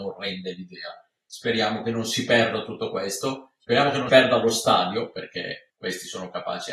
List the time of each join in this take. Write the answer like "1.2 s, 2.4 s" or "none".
4.1 s